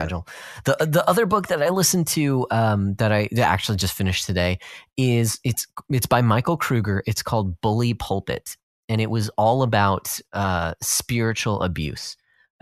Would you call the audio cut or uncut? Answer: uncut